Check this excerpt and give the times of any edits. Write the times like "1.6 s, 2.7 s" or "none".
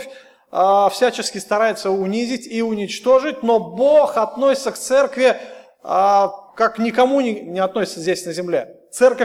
6.5 s